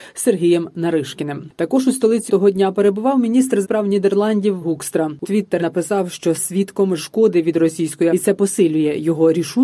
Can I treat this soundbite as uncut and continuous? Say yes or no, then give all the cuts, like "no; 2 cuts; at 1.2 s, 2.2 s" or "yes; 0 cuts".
no; 8 cuts; at 2.3 s, 3.6 s, 4.6 s, 5.2 s, 5.6 s, 6.4 s, 7.0 s, 8.1 s